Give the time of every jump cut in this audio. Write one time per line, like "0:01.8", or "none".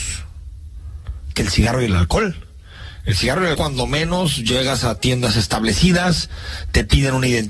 0:01.3
0:03.5